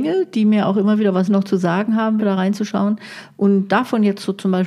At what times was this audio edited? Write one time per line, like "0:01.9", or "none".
0:01.3
0:02.2